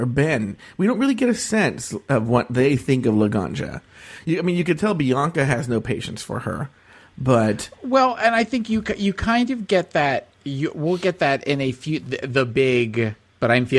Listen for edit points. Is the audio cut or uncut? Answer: cut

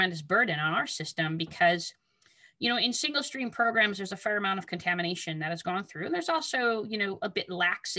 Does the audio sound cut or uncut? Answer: uncut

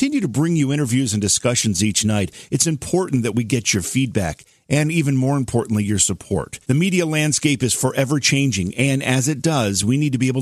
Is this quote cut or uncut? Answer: cut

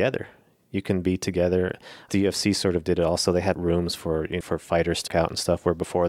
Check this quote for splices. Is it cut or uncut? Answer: cut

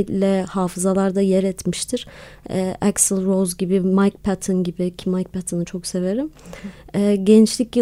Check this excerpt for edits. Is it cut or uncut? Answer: uncut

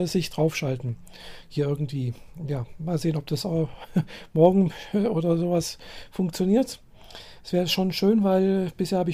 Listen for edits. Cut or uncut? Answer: uncut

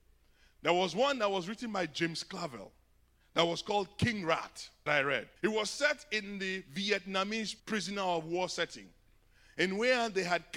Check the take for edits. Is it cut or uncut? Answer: cut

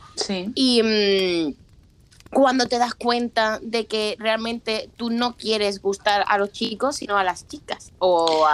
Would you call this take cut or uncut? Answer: uncut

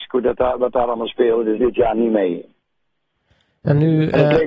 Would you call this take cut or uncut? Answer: cut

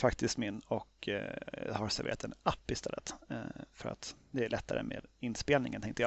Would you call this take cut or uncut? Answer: uncut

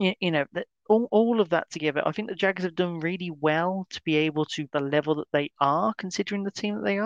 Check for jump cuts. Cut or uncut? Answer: cut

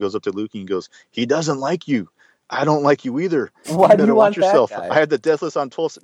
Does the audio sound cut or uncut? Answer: uncut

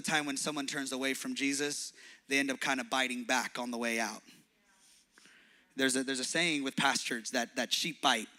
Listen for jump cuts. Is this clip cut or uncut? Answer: uncut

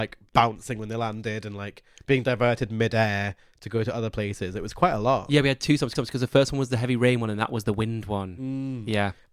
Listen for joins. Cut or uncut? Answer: cut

